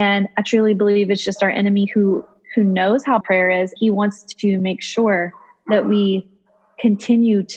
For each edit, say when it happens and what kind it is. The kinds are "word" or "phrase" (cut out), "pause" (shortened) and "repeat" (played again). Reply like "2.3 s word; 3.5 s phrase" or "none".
3.2 s word; 3.8 s word